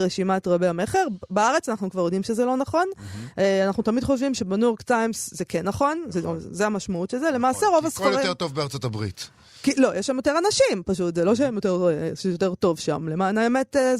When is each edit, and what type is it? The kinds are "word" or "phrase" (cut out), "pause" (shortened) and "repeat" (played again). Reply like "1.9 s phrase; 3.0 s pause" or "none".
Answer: none